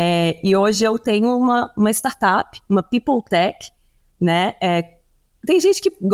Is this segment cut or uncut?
uncut